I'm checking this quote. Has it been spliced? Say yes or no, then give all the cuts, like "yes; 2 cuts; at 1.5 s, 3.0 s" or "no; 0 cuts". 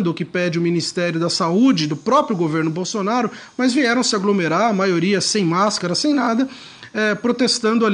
no; 0 cuts